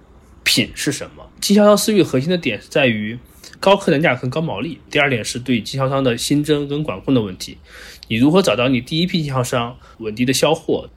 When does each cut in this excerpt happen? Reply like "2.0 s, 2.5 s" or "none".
1.3 s, 3.6 s